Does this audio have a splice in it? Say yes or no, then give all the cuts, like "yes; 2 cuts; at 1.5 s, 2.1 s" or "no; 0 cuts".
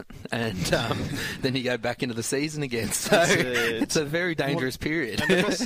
no; 0 cuts